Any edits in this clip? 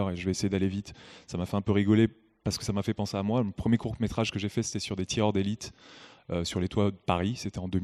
no; 0 cuts

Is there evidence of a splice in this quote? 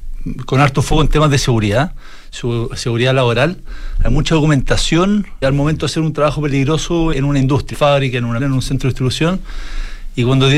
yes; 4 cuts; at 5.4 s, 7.1 s, 7.7 s, 8.4 s

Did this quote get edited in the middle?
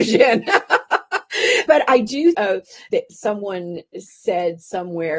yes; 3 cuts; at 1.7 s, 2.3 s, 2.9 s

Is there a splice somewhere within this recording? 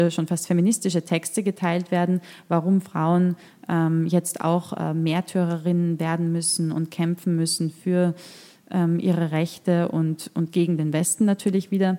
no; 0 cuts

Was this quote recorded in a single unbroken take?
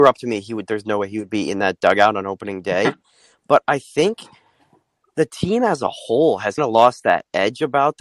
no; 1 cut; at 6.6 s

